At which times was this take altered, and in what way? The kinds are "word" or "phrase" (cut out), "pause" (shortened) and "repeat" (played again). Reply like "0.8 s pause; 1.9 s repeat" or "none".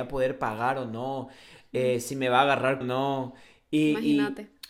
2.8 s word

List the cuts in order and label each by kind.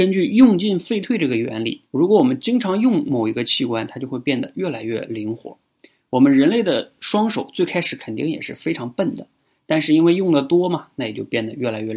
1.9 s pause

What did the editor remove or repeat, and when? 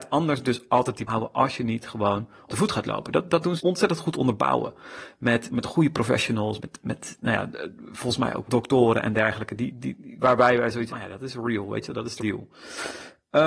1.1 s word; 2.5 s word; 3.6 s word; 5.5 s word; 6.6 s word; 8.5 s word; 10.9 s word; 12.2 s word

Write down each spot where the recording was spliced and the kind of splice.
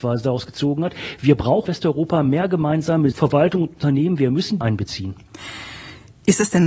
1.6 s word; 3.1 s phrase; 4.6 s phrase

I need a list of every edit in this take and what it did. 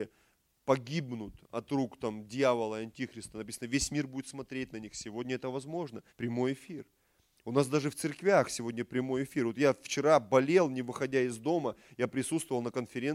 6.1 s pause

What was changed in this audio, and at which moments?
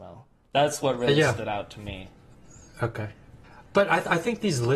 3.4 s pause

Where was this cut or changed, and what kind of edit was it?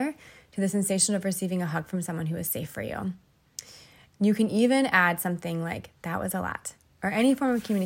none

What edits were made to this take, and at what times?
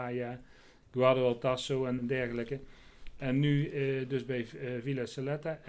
2.0 s word

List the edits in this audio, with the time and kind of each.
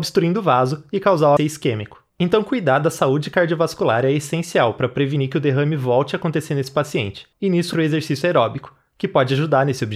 1.4 s word; 2.1 s pause; 7.3 s pause; 7.7 s word

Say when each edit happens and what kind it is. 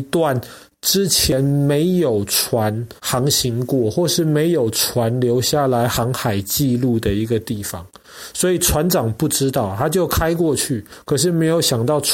3.0 s pause

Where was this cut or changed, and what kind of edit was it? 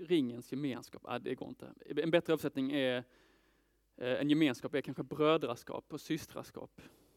none

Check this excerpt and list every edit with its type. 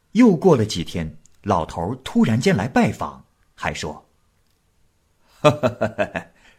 none

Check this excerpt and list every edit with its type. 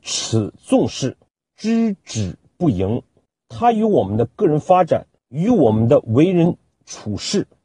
none

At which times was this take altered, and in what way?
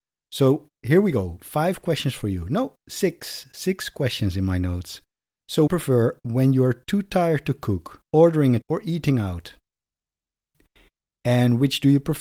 5.7 s phrase; 8.1 s pause; 8.6 s word

